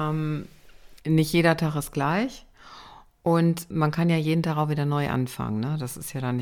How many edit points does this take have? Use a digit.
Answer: 2